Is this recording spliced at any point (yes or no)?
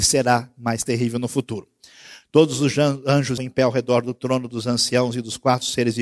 yes